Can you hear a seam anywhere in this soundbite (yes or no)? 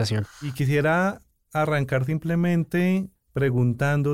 no